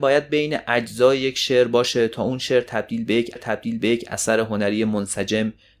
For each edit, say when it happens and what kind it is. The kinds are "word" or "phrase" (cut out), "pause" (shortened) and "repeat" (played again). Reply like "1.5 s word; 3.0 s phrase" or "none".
3.4 s repeat